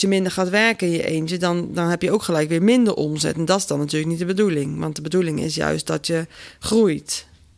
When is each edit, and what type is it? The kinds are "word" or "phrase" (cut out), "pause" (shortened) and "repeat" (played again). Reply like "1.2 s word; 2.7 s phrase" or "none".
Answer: none